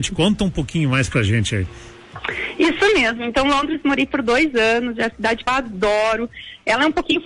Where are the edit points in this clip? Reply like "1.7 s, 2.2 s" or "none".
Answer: 5.1 s, 5.5 s

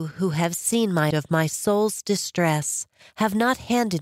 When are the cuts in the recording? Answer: 1.1 s

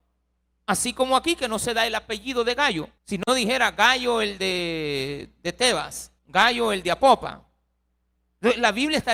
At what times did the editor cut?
3.0 s, 6.2 s

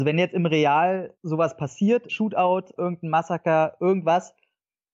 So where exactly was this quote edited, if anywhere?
1.1 s, 2.1 s, 2.8 s

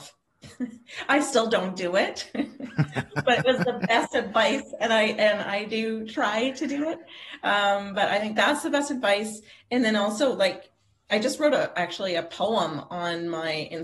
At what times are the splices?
none

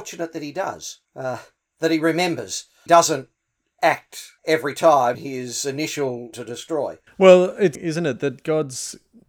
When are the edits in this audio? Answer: 1.0 s, 2.9 s, 4.4 s, 5.1 s, 6.3 s, 7.1 s, 7.7 s

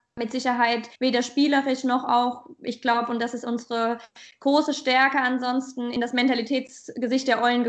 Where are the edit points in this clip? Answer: 1.0 s

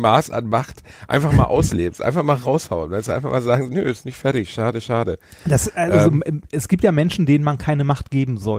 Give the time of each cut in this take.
3.7 s

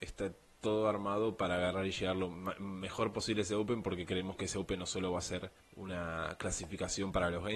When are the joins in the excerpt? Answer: 5.6 s

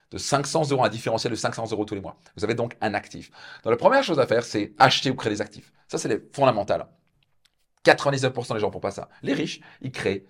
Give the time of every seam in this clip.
none

